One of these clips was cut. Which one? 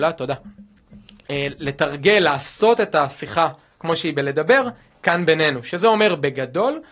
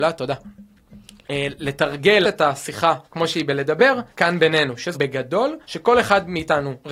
second; 5 cuts; at 2.2 s, 3.0 s, 4.1 s, 4.9 s, 5.6 s

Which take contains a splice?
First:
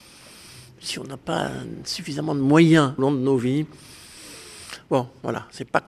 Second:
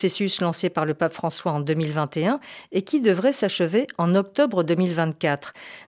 first; 1 cut; at 3.0 s

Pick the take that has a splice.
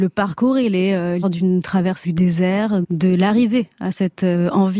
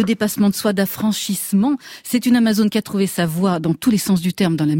first; 3 cuts; at 1.2 s, 2.0 s, 2.8 s

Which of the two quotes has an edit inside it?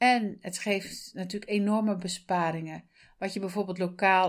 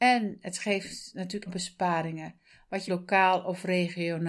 second; 2 cuts; at 1.5 s, 2.9 s

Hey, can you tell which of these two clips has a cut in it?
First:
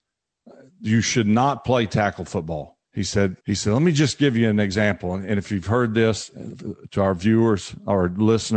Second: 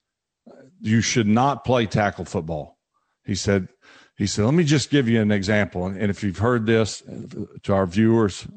first; 2 cuts; at 2.9 s, 3.4 s

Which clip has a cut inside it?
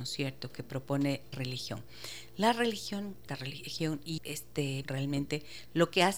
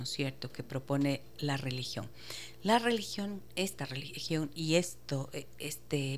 first; 4 cuts; at 1.3 s, 3.3 s, 4.2 s, 4.8 s

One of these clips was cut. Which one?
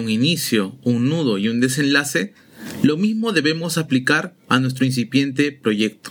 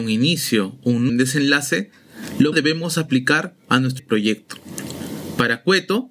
second; 3 cuts; at 1.1 s, 2.5 s, 4.0 s

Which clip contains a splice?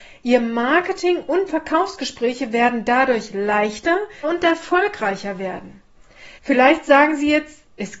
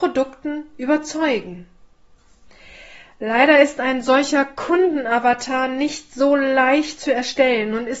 first; 3 cuts; at 1.5 s, 4.2 s, 6.4 s

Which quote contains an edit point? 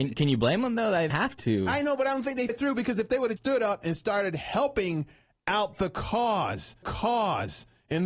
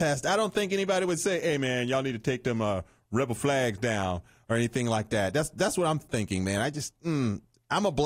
first; 4 cuts; at 1.1 s, 2.5 s, 3.4 s, 6.8 s

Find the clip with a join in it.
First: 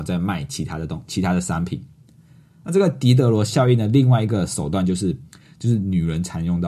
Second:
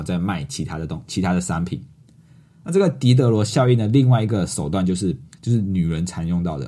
second; 1 cut; at 5.3 s

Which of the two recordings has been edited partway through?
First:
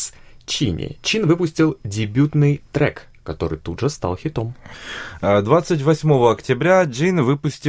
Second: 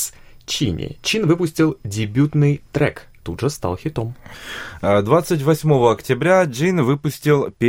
second; 1 cut; at 3.2 s

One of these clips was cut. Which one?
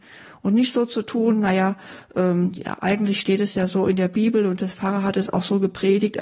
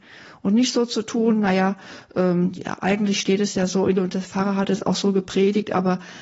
second; 1 cut; at 4.0 s

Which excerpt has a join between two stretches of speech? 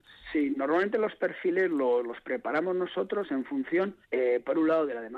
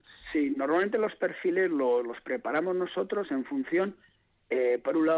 first; 1 cut; at 4.0 s

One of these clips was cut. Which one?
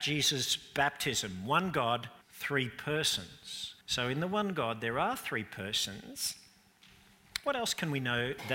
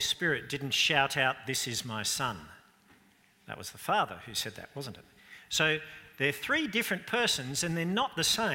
first; 2 cuts; at 2.2 s, 3.8 s

